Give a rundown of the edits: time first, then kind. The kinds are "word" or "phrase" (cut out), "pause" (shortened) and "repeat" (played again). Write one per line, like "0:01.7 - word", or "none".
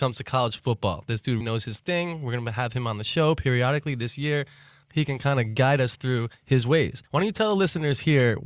0:01.4 - word
0:04.8 - word
0:06.4 - pause
0:07.1 - pause